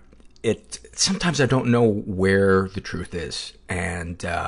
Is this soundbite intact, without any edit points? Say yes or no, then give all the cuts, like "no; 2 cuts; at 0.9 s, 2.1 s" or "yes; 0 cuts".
yes; 0 cuts